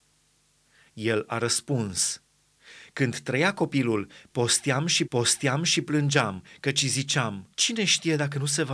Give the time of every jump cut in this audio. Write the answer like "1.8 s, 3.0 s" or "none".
5.1 s, 7.5 s